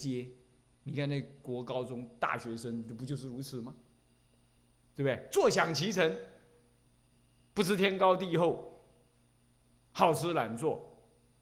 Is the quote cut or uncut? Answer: uncut